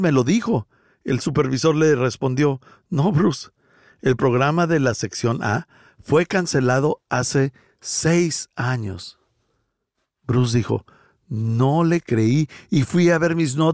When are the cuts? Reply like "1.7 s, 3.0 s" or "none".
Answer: none